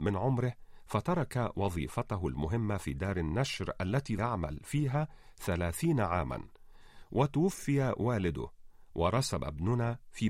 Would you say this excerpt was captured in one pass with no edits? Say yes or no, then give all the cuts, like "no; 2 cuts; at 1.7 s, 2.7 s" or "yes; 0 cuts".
no; 1 cut; at 4.2 s